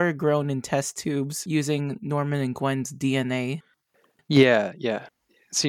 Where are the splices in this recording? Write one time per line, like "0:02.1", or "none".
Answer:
none

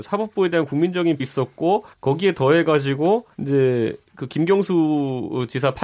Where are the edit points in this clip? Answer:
0:01.2
0:01.9
0:03.3

